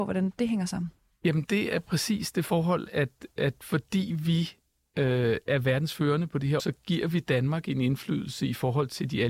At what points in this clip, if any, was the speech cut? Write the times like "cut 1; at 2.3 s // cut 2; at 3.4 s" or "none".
cut 1; at 6.6 s